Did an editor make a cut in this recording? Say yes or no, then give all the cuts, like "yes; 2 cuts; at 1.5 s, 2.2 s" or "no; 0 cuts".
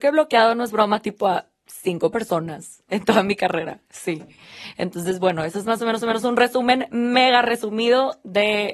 yes; 1 cut; at 6.0 s